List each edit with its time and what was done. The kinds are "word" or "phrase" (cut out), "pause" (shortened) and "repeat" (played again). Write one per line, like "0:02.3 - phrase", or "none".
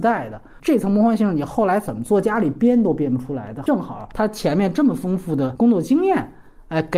none